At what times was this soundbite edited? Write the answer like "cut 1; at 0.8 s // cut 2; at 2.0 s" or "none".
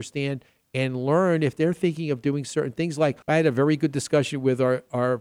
cut 1; at 3.2 s